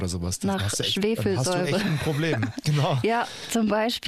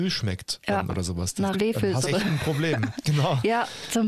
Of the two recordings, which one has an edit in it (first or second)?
second